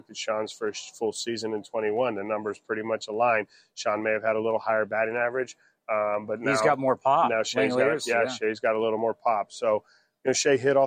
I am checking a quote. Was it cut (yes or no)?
no